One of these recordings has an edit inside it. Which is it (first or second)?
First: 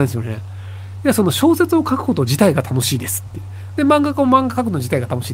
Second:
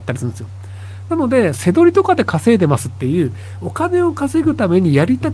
second